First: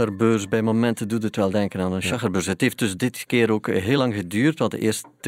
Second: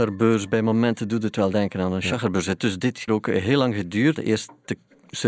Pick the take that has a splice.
second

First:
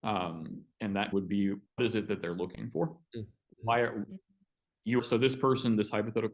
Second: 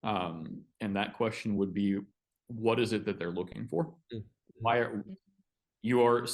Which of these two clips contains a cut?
first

